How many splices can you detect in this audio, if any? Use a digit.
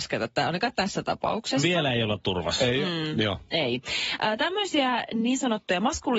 0